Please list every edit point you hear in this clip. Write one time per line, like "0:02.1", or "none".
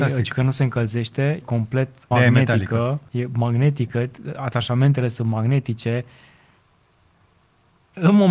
0:01.4
0:02.1
0:03.1